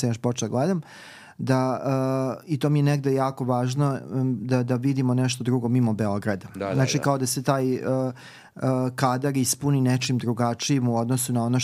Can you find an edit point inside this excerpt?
no; 0 cuts

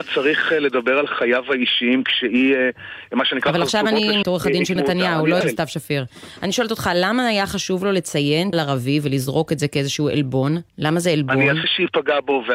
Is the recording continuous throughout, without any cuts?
no; 6 cuts; at 4.2 s, 4.8 s, 5.4 s, 8.5 s, 10.7 s, 11.6 s

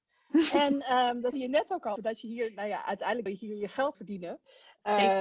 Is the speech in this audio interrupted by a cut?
yes; 4 cuts; at 1.3 s, 2.0 s, 3.3 s, 3.9 s

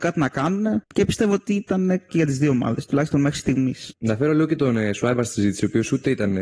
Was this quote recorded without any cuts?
no; 1 cut; at 2.1 s

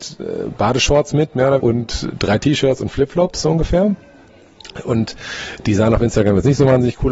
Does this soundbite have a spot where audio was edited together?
yes; 1 cut; at 1.6 s

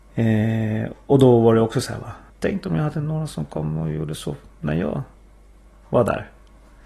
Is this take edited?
yes; 1 cut; at 2.3 s

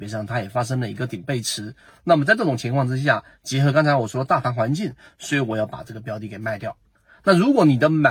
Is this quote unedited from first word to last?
yes; 0 cuts

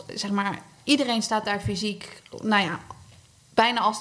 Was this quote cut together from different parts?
no; 0 cuts

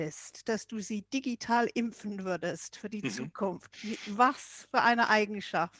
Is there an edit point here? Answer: no; 0 cuts

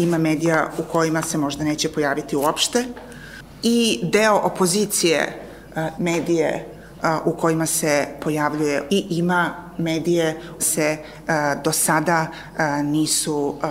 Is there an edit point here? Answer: yes; 3 cuts; at 6.0 s, 8.9 s, 10.6 s

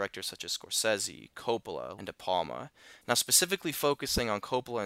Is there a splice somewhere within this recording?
yes; 2 cuts; at 2.0 s, 3.0 s

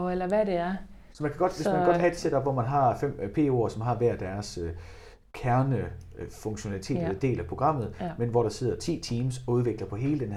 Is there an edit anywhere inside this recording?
no; 0 cuts

